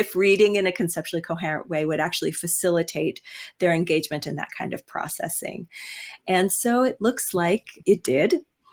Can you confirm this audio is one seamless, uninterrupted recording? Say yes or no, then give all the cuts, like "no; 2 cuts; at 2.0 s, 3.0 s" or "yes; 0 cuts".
yes; 0 cuts